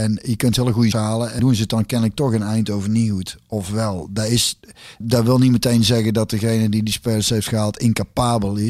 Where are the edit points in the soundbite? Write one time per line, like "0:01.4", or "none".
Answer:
0:00.9
0:01.4
0:05.0